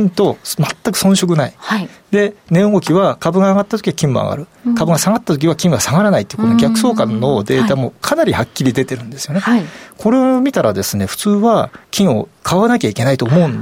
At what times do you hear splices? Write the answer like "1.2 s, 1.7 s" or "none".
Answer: 11.8 s